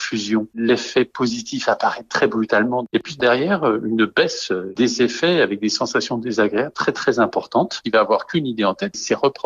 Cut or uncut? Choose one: uncut